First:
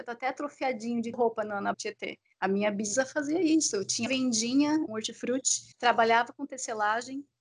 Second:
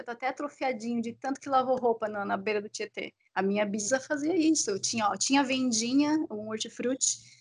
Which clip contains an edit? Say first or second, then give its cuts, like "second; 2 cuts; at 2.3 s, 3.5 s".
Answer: first; 5 cuts; at 1.1 s, 1.7 s, 4.1 s, 4.9 s, 5.7 s